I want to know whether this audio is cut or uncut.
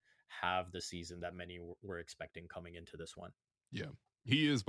uncut